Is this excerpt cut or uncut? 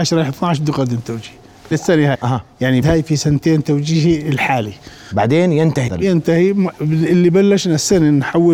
cut